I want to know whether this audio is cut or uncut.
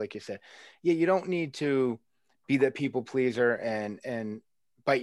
uncut